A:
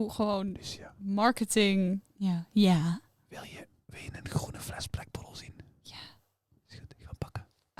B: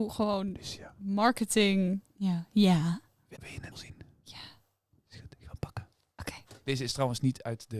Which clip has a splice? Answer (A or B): B